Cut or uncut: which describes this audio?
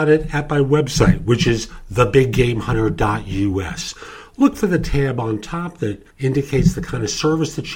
cut